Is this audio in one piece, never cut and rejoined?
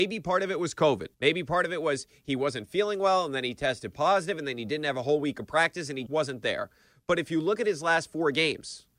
no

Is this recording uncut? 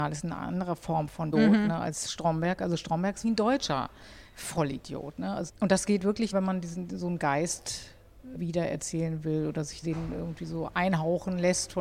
no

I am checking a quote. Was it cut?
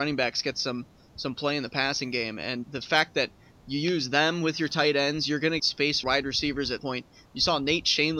yes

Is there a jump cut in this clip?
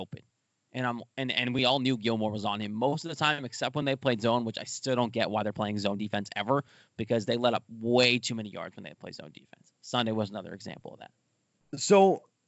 no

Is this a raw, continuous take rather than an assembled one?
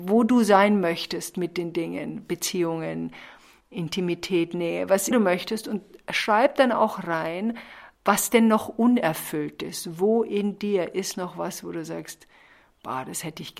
no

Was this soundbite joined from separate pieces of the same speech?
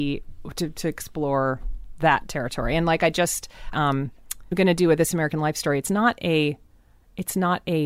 yes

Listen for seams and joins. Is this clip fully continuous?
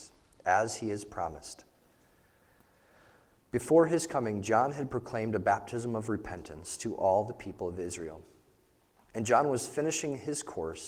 yes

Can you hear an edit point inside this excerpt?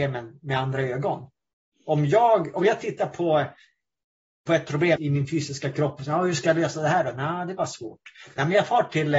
yes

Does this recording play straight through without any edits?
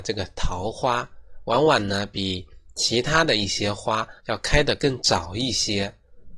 no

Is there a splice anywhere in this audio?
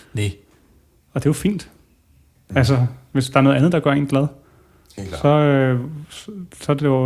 no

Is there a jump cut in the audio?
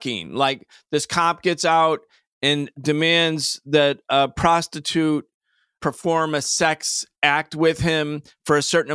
no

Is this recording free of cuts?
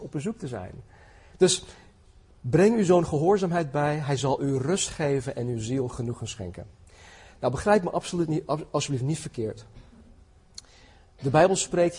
yes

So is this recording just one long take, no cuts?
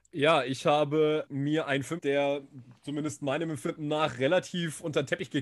no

